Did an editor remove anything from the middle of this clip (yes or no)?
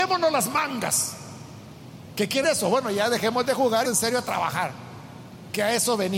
yes